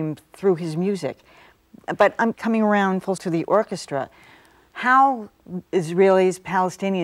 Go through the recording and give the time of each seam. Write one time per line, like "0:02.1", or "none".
0:02.3
0:03.2
0:05.7